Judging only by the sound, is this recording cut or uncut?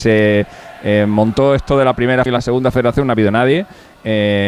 cut